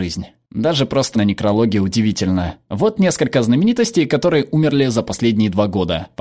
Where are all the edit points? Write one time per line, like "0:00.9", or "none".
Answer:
0:01.1